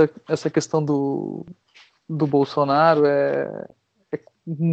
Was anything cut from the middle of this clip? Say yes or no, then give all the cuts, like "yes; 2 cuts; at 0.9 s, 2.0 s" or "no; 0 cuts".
no; 0 cuts